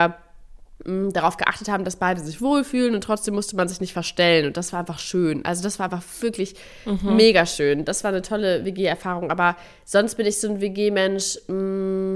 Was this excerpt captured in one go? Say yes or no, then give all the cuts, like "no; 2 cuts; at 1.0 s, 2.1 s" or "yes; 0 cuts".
yes; 0 cuts